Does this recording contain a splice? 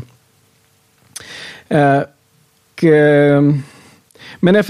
yes; 1 cut; at 2.8 s

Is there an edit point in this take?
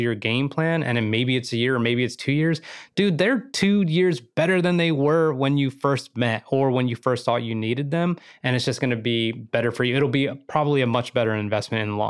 no; 0 cuts

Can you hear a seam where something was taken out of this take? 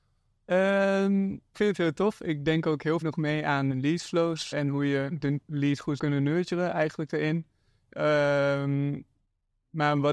yes; 5 cuts; at 1.5 s, 3.0 s, 3.7 s, 4.5 s, 6.0 s

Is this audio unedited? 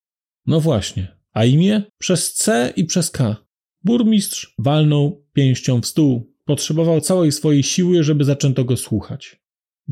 no; 3 cuts; at 1.9 s, 3.7 s, 6.4 s

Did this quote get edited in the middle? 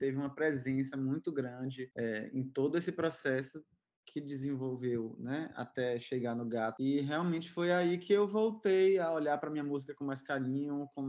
no; 0 cuts

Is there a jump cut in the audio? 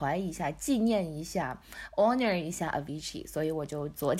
no; 0 cuts

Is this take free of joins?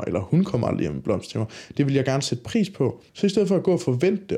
no; 1 cut; at 3.1 s

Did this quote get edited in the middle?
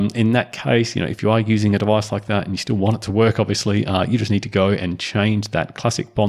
no; 0 cuts

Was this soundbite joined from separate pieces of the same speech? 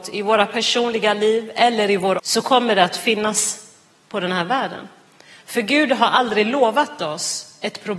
yes; 1 cut; at 2.2 s

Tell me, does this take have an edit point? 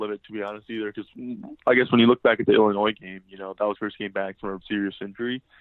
yes; 2 cuts; at 3.8 s, 4.6 s

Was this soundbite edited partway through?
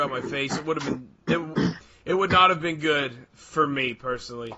no; 0 cuts

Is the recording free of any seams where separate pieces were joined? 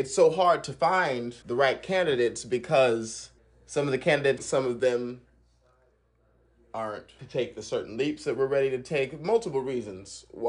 no; 4 cuts; at 1.4 s, 3.4 s, 4.4 s, 7.2 s

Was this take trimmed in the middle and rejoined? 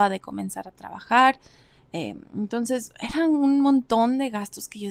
no; 0 cuts

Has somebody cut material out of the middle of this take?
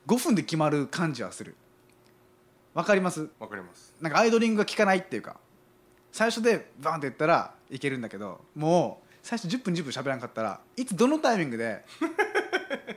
yes; 1 cut; at 3.3 s

